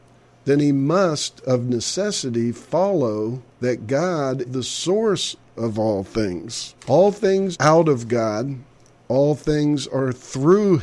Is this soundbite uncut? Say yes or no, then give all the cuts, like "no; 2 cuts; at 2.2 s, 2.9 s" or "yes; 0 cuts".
no; 4 cuts; at 3.5 s, 4.4 s, 6.8 s, 7.5 s